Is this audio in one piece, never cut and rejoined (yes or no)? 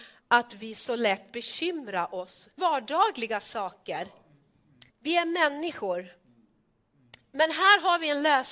no